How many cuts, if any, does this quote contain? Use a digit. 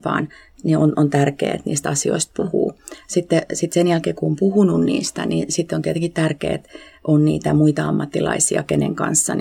0